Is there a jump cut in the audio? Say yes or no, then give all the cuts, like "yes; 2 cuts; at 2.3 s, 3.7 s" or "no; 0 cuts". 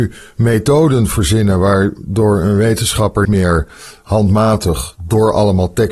yes; 1 cut; at 3.2 s